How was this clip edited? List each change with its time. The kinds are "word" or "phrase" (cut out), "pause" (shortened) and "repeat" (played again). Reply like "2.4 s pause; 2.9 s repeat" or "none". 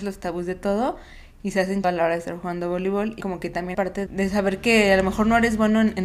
1.8 s phrase; 3.2 s phrase; 3.7 s word; 4.1 s word